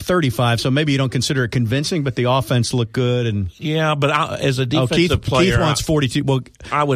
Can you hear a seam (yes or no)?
no